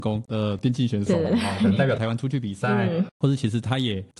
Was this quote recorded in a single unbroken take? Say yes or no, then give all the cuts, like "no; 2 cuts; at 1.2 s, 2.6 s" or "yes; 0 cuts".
yes; 0 cuts